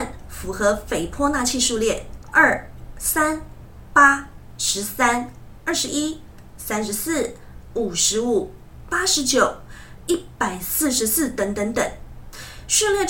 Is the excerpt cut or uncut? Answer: cut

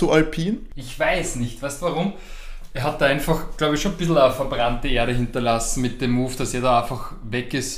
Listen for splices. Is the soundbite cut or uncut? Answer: uncut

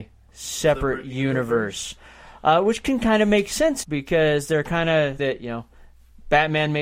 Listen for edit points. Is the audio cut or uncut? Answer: cut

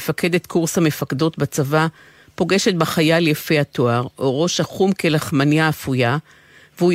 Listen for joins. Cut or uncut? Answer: uncut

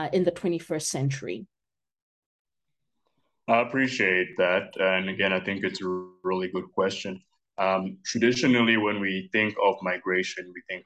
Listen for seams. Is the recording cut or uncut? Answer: uncut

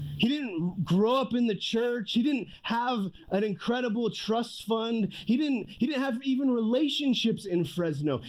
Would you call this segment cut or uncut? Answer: uncut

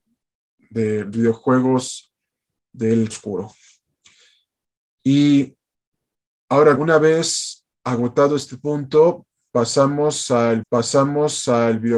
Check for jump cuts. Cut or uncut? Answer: cut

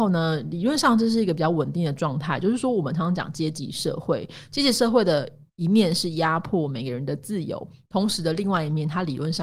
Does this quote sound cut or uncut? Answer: uncut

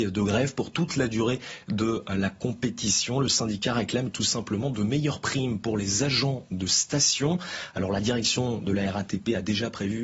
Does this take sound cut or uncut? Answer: uncut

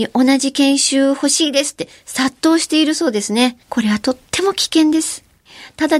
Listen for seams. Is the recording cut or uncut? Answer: cut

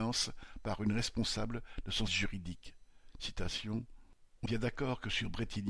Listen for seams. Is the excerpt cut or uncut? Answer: cut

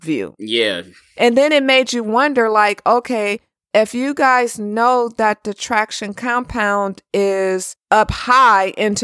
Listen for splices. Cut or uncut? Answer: uncut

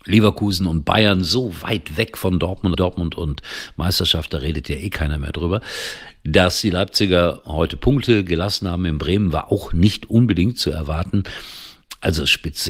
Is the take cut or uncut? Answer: cut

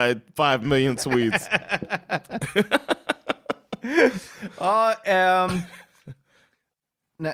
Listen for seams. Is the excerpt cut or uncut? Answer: uncut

